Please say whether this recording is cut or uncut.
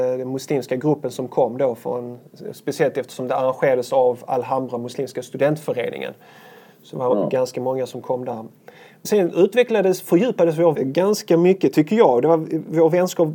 cut